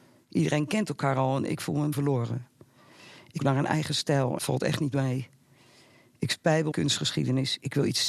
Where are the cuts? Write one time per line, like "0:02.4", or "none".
0:01.9
0:03.4
0:04.4
0:06.7